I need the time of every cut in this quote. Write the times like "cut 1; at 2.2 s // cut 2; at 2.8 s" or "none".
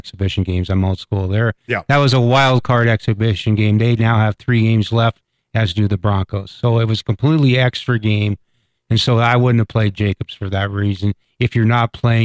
none